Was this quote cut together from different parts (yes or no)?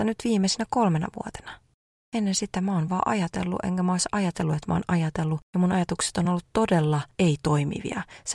no